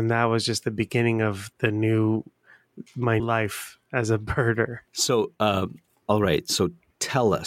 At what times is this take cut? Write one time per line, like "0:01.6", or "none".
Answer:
0:01.5
0:03.2
0:04.9